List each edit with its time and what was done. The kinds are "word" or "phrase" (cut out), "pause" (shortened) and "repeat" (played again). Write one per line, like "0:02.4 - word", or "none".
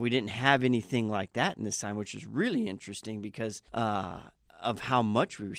0:03.7 - pause